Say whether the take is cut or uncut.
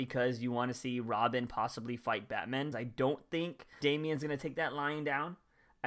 cut